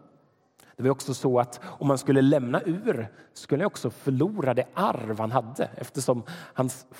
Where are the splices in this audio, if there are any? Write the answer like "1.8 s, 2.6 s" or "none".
none